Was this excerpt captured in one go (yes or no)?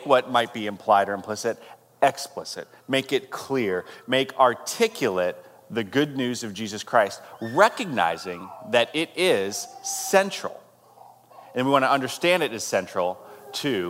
yes